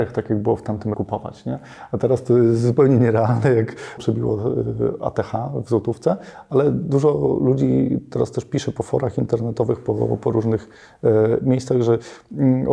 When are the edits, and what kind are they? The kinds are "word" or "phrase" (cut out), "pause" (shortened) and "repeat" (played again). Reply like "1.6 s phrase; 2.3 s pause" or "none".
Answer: 0.9 s phrase; 4.0 s word